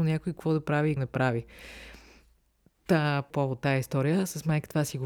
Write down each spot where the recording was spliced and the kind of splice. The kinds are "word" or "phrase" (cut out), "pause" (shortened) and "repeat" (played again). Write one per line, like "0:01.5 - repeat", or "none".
0:01.0 - phrase
0:03.3 - phrase